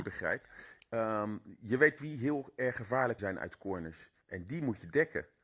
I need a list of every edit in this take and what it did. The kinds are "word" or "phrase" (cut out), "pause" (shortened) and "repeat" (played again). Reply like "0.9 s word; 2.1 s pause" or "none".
2.0 s word; 3.2 s word; 4.2 s pause